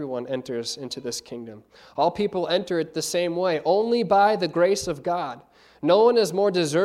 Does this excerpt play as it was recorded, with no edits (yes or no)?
yes